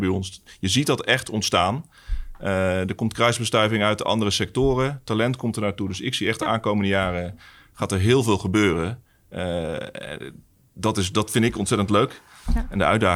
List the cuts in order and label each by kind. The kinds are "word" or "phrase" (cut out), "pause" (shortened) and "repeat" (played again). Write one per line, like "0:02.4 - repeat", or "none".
none